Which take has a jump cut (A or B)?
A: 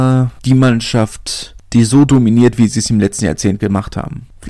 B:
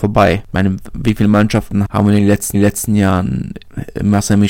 B